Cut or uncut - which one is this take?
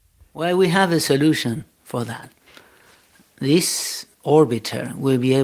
cut